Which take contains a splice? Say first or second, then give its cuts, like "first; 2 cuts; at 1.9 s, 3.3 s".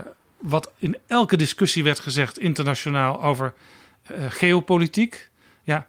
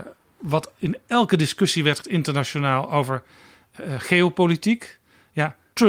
second; 1 cut; at 2.0 s